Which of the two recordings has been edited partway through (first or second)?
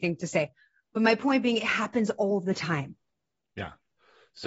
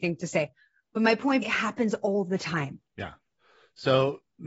second